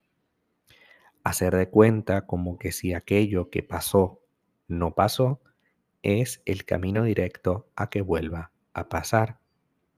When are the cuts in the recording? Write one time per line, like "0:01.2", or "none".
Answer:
none